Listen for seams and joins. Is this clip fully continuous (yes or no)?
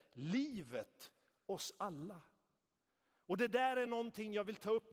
yes